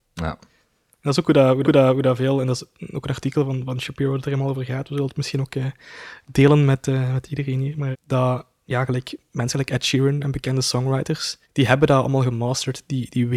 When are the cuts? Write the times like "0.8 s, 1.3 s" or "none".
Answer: 1.6 s, 7.9 s, 11.4 s